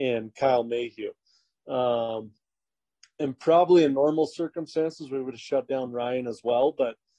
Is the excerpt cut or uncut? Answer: uncut